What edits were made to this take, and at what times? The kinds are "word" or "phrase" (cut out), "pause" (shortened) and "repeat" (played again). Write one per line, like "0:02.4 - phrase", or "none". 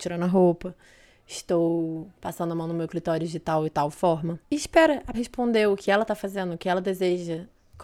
0:02.1 - pause
0:04.4 - pause
0:05.1 - word